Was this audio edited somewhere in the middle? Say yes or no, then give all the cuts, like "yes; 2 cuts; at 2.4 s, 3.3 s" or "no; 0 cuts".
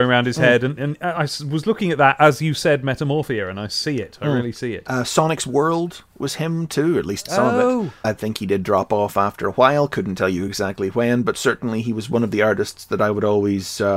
no; 0 cuts